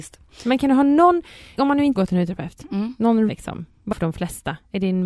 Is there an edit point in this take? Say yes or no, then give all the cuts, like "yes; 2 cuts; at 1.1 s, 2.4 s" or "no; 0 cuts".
yes; 4 cuts; at 1.6 s, 2.0 s, 3.3 s, 3.9 s